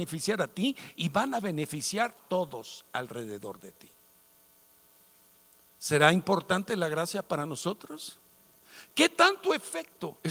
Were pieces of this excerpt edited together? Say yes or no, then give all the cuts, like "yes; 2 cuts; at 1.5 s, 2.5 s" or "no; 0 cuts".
yes; 1 cut; at 2.2 s